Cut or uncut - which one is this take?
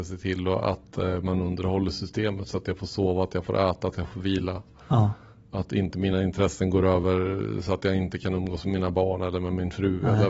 uncut